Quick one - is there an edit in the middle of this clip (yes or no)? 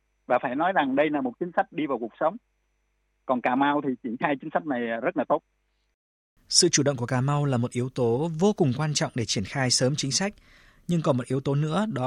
no